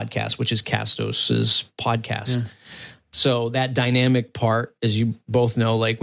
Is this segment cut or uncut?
uncut